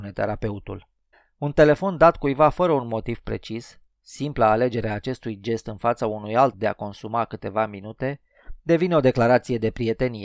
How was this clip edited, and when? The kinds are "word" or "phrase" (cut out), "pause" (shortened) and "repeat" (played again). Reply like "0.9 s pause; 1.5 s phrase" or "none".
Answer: 1.1 s pause; 6.5 s word